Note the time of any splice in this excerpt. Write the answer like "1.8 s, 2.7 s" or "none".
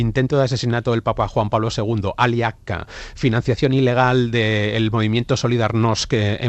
none